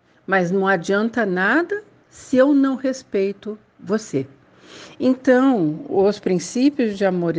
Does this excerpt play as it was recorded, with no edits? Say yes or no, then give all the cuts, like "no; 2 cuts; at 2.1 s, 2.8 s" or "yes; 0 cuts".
yes; 0 cuts